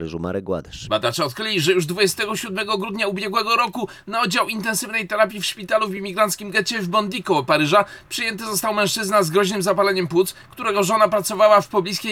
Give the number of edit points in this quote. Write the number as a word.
zero